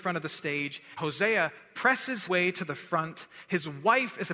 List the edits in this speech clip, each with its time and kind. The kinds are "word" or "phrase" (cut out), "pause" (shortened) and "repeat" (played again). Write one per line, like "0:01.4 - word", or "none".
0:01.0 - word
0:02.3 - word

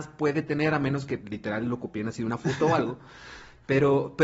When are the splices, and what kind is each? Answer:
0:01.2 - word

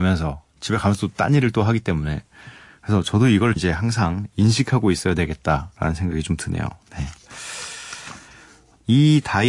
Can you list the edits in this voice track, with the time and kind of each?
0:03.6 - word

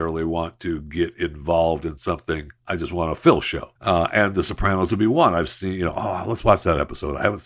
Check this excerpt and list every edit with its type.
0:02.6 - pause
0:03.8 - pause

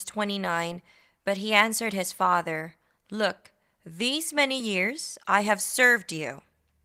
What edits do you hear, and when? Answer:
none

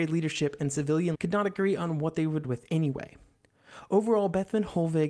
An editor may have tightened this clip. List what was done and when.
0:01.1 - word
0:02.4 - word

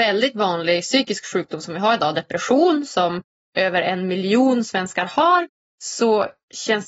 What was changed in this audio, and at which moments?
none

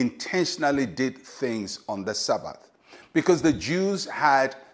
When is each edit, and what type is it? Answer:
none

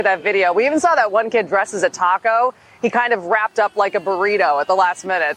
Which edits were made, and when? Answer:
none

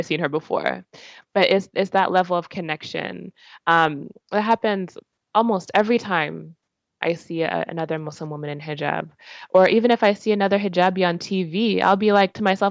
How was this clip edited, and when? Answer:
none

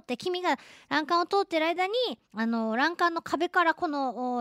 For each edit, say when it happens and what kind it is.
0:02.2 - pause

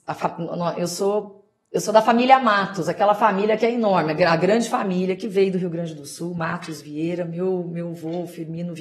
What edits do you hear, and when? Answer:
none

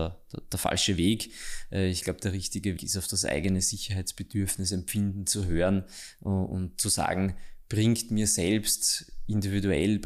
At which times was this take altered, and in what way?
0:02.8 - word

